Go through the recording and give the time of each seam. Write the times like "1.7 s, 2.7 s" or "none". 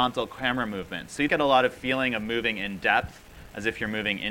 1.3 s